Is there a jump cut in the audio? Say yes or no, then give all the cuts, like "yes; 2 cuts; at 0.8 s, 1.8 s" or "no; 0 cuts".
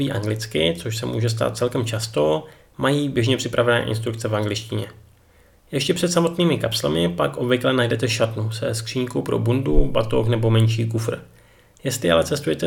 no; 0 cuts